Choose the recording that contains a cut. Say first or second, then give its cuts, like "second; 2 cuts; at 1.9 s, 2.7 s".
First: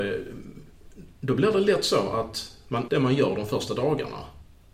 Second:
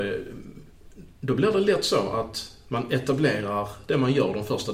first; 1 cut; at 2.9 s